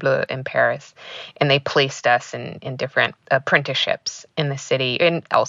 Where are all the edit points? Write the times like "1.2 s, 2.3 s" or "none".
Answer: 3.2 s